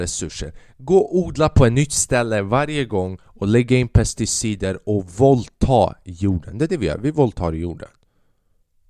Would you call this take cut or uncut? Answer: uncut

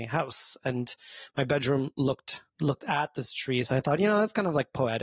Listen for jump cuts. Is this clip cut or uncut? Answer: cut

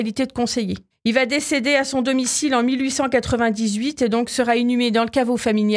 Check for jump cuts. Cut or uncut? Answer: uncut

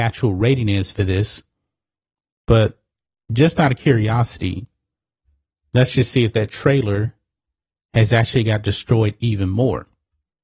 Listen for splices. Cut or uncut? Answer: uncut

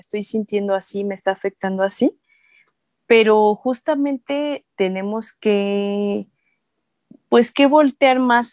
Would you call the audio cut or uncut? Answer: uncut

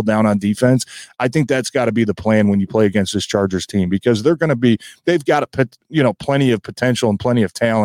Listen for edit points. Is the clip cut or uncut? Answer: cut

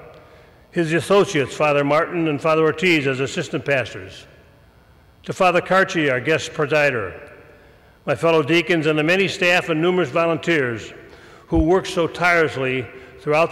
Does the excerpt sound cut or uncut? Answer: uncut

